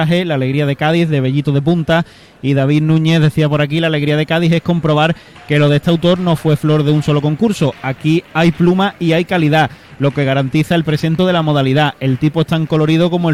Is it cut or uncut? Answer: cut